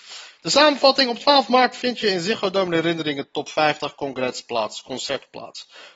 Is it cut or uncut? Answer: uncut